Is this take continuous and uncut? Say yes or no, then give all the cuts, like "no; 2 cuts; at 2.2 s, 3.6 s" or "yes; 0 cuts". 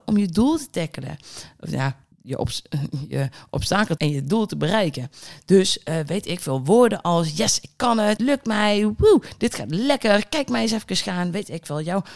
no; 3 cuts; at 2.1 s, 4.0 s, 8.2 s